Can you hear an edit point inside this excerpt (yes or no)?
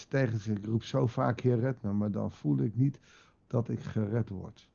no